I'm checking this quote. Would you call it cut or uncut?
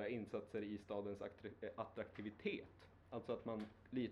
cut